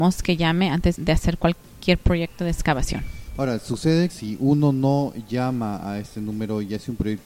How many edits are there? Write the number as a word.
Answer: two